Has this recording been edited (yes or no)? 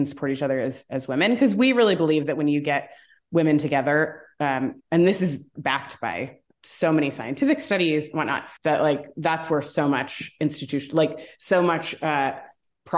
yes